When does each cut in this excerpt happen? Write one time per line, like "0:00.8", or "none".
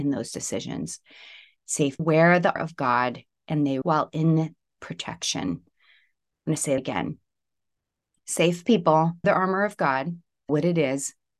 0:02.0
0:02.6
0:03.8
0:04.8
0:06.8
0:09.2
0:10.5